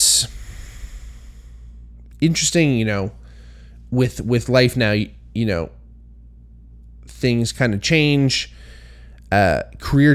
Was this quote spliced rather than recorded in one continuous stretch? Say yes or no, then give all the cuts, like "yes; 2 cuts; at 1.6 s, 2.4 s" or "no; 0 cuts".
no; 0 cuts